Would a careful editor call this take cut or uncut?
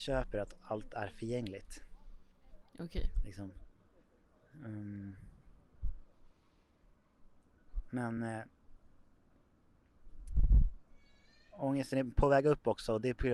uncut